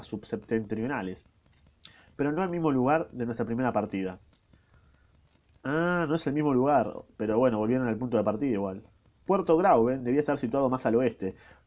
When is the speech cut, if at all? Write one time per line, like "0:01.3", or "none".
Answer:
none

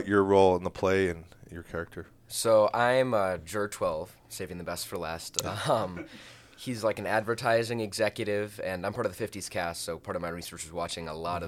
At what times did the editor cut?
none

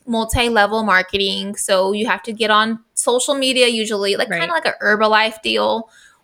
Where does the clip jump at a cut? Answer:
none

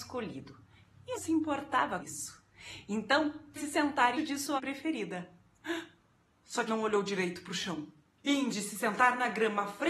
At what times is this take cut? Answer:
0:01.1
0:02.0
0:03.6
0:04.2
0:04.6
0:06.7
0:08.5

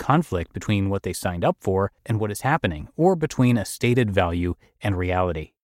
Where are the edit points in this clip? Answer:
0:02.0

